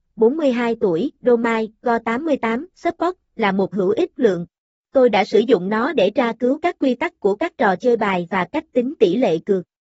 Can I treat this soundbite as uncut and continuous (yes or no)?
no